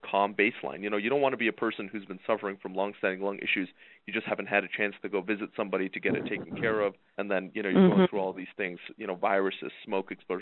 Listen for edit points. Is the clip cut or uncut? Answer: cut